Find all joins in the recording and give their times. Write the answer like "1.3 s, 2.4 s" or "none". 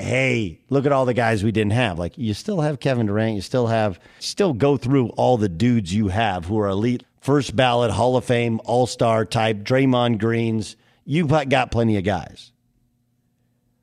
4.2 s, 7.0 s

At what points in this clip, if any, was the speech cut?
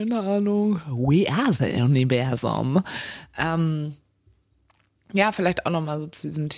none

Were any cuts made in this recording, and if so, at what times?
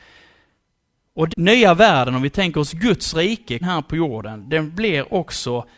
1.3 s, 3.6 s

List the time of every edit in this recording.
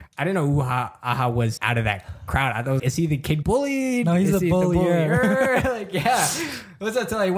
1.6 s, 2.8 s, 3.4 s

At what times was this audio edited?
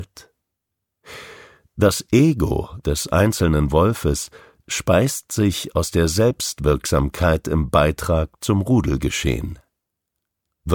none

